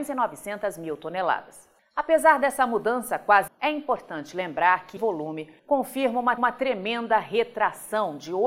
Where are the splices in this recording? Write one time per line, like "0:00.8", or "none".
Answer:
0:01.8
0:03.5
0:05.0
0:05.6
0:06.4